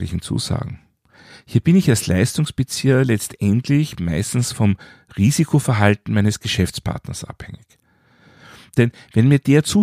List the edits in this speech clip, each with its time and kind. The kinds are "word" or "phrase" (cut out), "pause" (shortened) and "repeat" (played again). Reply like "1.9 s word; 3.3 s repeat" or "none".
none